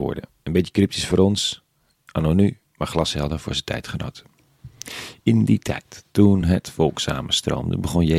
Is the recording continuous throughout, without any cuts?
yes; 0 cuts

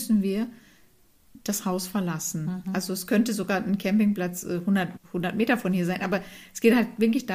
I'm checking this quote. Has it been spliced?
yes; 1 cut; at 5.0 s

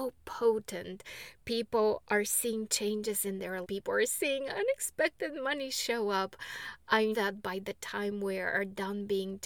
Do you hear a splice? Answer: yes; 2 cuts; at 3.6 s, 7.1 s

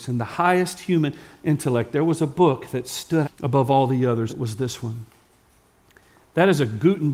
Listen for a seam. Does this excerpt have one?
yes; 2 cuts; at 3.2 s, 4.3 s

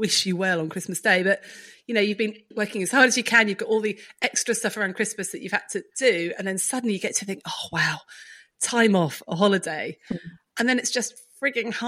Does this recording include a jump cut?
no; 0 cuts

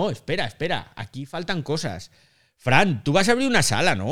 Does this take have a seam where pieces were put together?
no; 0 cuts

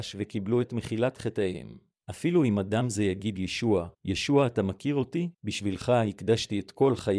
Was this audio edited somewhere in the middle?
yes; 3 cuts; at 2.0 s, 3.9 s, 5.3 s

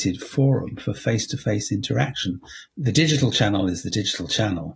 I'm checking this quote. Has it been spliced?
no; 0 cuts

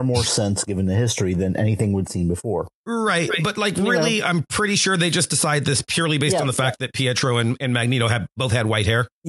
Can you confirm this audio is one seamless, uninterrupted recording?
yes; 0 cuts

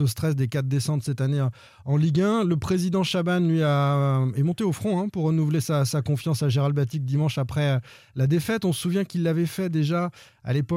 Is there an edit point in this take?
no; 0 cuts

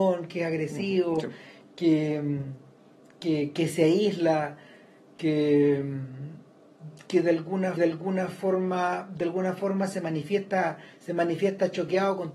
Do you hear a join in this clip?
yes; 1 cut; at 7.8 s

